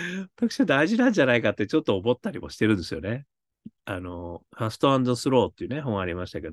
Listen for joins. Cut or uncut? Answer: cut